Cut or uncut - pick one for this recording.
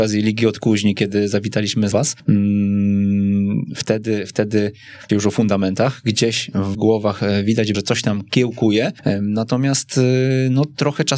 cut